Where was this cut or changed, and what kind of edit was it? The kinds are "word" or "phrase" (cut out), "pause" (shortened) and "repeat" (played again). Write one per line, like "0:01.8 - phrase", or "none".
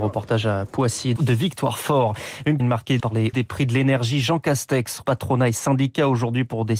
0:01.2 - word
0:02.6 - word
0:03.0 - word
0:03.3 - word
0:05.0 - word